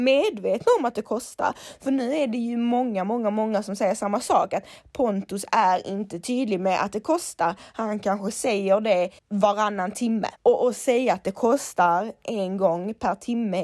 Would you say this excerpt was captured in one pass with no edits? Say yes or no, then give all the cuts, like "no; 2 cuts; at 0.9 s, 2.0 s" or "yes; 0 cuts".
no; 2 cuts; at 9.2 s, 10.4 s